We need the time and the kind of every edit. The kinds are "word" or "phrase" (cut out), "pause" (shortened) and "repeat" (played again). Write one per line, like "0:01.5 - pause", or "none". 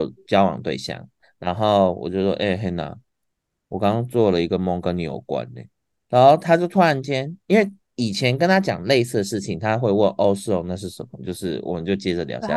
none